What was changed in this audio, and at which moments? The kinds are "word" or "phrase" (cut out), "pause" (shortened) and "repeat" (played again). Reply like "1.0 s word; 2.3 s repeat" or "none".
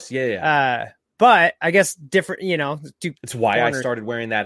none

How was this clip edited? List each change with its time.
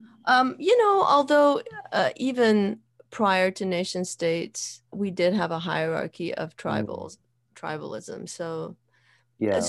4.9 s word

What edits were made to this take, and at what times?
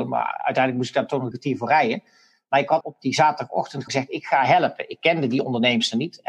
1.3 s word; 2.8 s word; 3.9 s word

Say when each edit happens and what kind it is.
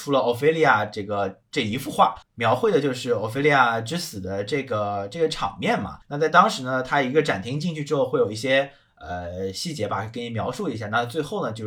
1.4 s pause; 2.2 s pause; 6.0 s pause

